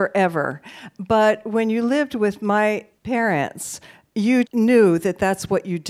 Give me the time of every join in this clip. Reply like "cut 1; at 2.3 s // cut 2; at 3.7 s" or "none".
cut 1; at 3.0 s // cut 2; at 4.4 s